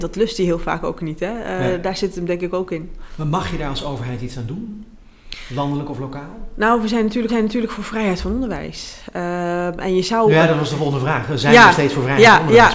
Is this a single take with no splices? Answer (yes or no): no